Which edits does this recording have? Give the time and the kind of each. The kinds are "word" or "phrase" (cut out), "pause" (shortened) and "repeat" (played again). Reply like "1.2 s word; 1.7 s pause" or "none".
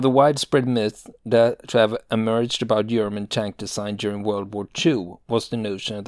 none